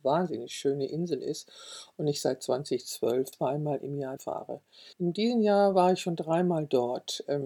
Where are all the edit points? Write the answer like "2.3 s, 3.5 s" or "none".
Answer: 3.3 s, 4.2 s, 4.9 s